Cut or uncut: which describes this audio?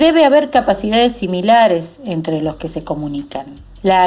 uncut